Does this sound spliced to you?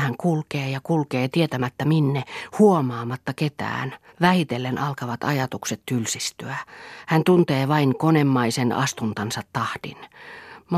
yes; 1 cut; at 4.1 s

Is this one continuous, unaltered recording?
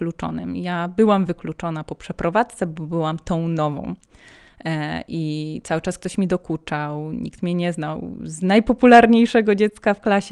yes; 0 cuts

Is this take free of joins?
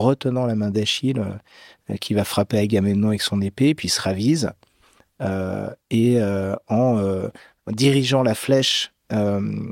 yes; 0 cuts

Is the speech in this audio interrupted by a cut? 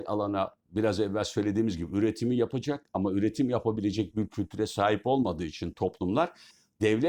no; 0 cuts

